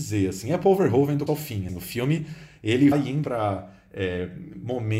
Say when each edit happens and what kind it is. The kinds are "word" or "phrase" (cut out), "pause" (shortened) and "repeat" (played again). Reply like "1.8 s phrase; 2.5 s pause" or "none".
1.3 s word; 1.7 s word; 2.9 s word; 3.2 s word